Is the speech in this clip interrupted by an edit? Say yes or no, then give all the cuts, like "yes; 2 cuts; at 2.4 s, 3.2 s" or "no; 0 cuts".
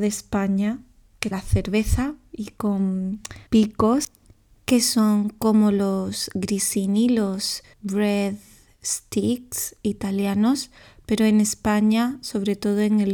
yes; 3 cuts; at 1.3 s, 3.5 s, 7.7 s